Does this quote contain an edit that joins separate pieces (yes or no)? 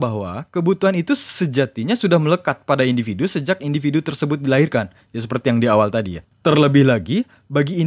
no